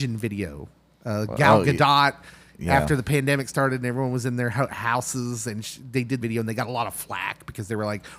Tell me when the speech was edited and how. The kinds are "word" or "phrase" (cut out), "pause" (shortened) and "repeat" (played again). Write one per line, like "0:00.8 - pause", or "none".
0:06.2 - phrase